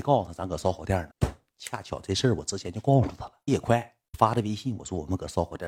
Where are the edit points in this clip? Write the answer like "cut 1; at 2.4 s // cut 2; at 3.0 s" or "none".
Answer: cut 1; at 1.1 s

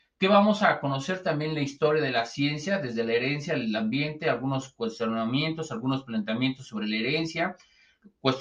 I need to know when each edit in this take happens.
none

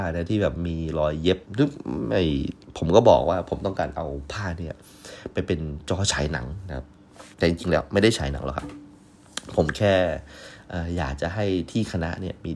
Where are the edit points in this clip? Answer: cut 1; at 1.5 s // cut 2; at 7.3 s

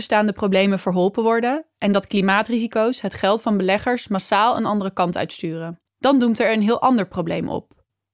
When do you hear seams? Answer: cut 1; at 5.9 s

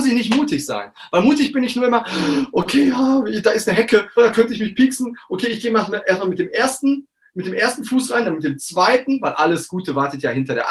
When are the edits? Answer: cut 1; at 4.2 s

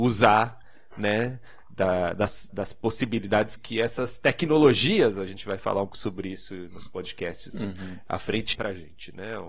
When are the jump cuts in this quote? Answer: cut 1; at 2.5 s // cut 2; at 3.6 s // cut 3; at 5.9 s // cut 4; at 8.5 s

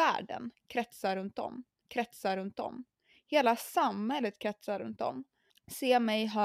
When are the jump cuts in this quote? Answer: cut 1; at 1.8 s

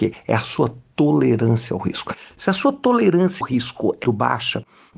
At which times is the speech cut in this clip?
cut 1; at 3.4 s // cut 2; at 4.0 s

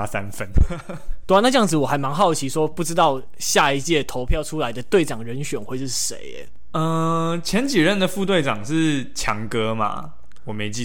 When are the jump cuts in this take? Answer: cut 1; at 1.2 s

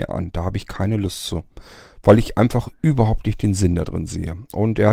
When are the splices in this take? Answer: none

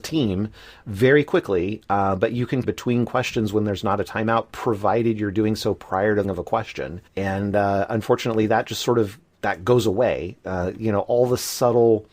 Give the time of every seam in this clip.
cut 1; at 2.6 s // cut 2; at 6.2 s // cut 3; at 7.1 s

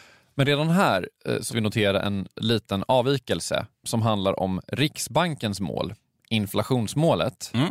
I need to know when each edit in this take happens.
cut 1; at 1.5 s // cut 2; at 3.7 s

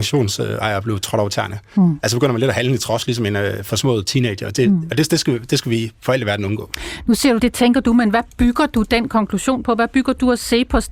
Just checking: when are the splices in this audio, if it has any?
cut 1; at 7.4 s

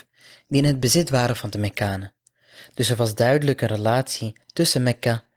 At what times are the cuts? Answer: cut 1; at 4.4 s

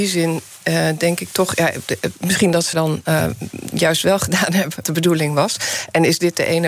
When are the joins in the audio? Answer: cut 1; at 2.7 s // cut 2; at 4.8 s

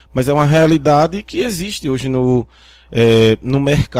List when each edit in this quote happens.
cut 1; at 1.2 s

